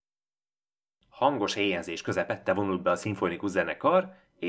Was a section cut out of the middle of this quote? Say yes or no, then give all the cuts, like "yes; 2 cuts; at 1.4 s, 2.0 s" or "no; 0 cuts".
no; 0 cuts